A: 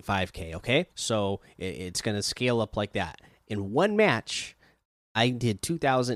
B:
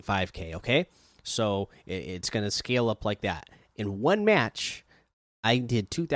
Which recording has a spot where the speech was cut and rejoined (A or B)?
A